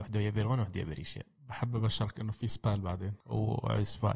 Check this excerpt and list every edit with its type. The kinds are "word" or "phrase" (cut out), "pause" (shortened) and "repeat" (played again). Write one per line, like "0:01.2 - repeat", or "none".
0:03.2 - pause

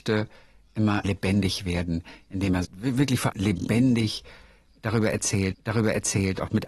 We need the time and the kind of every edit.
0:01.0 - word
0:02.6 - phrase
0:03.3 - word
0:05.5 - repeat

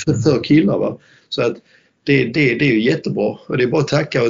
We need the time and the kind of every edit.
none

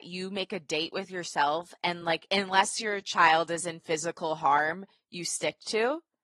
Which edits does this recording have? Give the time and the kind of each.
none

